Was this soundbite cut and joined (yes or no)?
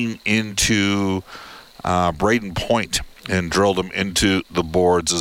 no